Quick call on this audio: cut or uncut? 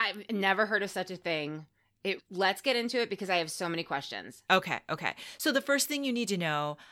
cut